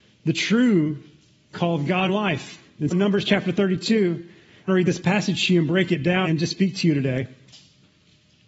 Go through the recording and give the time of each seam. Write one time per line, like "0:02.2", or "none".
0:02.1
0:02.9
0:04.7
0:06.2